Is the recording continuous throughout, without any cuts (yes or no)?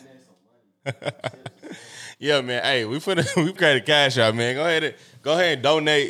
no